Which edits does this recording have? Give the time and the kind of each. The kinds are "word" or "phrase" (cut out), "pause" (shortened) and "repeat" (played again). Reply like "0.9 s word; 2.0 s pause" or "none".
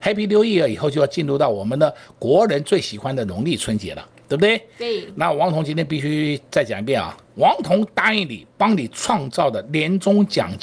7.2 s pause